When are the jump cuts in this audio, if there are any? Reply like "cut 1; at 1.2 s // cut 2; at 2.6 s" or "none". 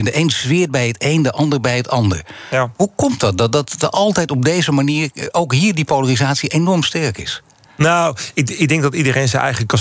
none